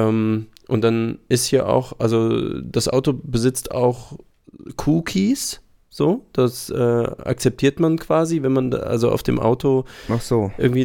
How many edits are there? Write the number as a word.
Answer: zero